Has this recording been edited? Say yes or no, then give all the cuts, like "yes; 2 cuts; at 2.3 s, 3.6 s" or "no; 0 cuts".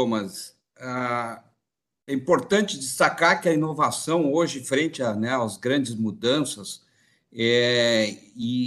no; 0 cuts